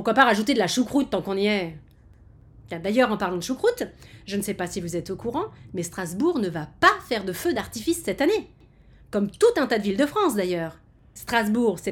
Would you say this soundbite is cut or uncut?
uncut